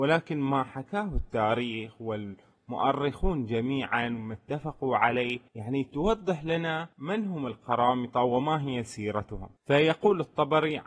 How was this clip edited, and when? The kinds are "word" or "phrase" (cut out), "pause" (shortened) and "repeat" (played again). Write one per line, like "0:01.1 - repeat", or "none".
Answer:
0:05.5 - pause
0:06.9 - pause
0:09.6 - pause